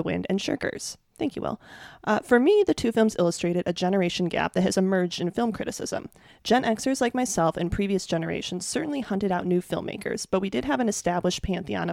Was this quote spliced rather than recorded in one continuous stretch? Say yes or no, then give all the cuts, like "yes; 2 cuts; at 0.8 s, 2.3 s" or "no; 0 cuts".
no; 0 cuts